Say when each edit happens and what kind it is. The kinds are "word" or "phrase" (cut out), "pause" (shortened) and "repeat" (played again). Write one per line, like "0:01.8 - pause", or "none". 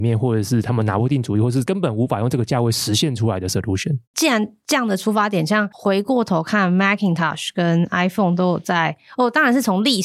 0:04.0 - pause